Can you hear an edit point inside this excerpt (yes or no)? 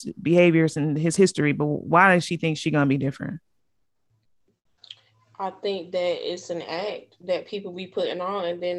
no